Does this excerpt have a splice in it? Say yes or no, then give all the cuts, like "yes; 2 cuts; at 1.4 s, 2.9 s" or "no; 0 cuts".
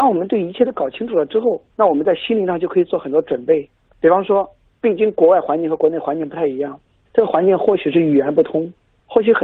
no; 0 cuts